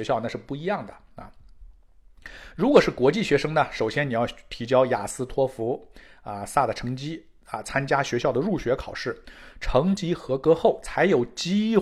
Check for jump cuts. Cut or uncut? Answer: uncut